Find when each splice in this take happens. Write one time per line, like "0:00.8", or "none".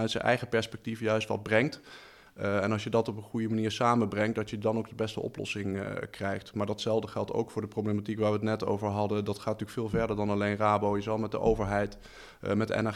none